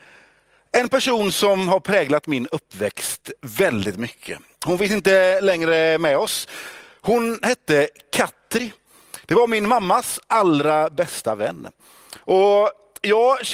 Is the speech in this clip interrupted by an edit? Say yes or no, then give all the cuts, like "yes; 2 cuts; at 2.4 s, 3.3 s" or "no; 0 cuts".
no; 0 cuts